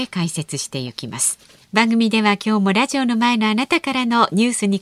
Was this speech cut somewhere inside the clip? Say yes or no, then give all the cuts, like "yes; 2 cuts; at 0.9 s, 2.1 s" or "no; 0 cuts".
yes; 1 cut; at 1.6 s